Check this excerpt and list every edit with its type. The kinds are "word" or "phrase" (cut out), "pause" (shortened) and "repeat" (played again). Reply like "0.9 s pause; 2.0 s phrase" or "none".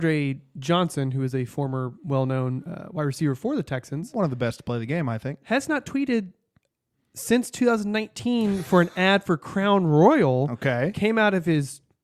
none